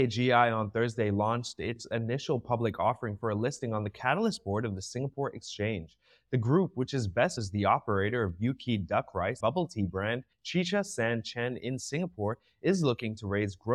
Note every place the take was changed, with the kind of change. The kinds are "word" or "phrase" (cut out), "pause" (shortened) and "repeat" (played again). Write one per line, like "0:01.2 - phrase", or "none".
0:07.4 - word
0:09.4 - word
0:10.3 - pause

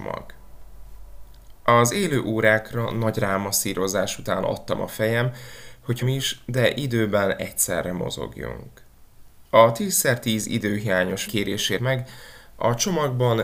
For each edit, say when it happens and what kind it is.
0:06.0 - phrase
0:09.5 - pause
0:11.3 - word
0:11.8 - word

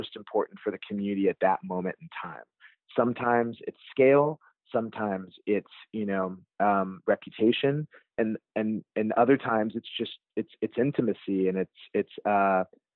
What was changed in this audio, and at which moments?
none

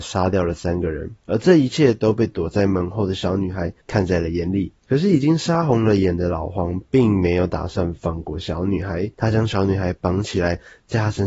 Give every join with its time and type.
0:01.2 - pause
0:03.8 - pause

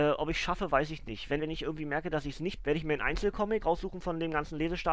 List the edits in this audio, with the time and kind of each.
0:01.4 - word
0:02.6 - word
0:03.6 - word

